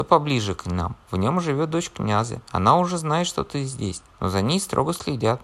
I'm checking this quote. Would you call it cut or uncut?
cut